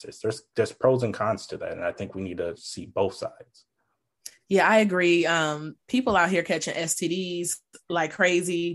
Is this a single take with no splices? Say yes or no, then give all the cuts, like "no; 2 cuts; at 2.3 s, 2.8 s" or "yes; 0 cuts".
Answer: yes; 0 cuts